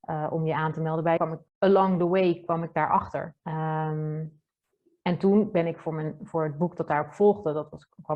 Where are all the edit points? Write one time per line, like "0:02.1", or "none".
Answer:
0:01.2
0:01.5
0:03.4